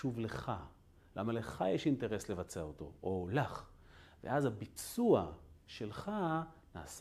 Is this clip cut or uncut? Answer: uncut